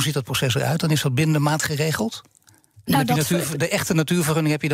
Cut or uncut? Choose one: uncut